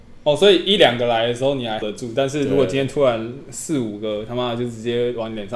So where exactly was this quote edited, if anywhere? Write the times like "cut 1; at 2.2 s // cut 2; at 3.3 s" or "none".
cut 1; at 1.8 s